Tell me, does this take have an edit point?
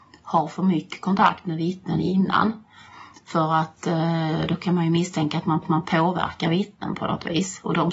yes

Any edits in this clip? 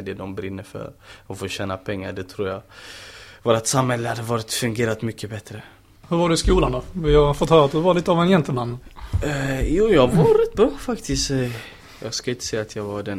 no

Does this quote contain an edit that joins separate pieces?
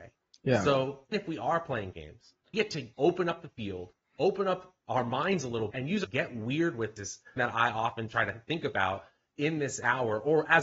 yes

